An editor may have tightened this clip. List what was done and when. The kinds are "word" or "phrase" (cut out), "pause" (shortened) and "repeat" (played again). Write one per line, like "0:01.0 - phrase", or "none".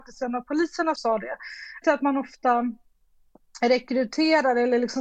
0:01.0 - word
0:01.8 - phrase